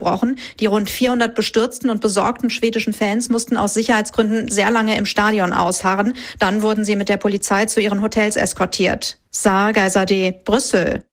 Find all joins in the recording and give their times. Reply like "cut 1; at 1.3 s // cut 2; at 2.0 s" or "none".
cut 1; at 9.2 s